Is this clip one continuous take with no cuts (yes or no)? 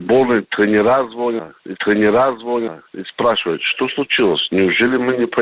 no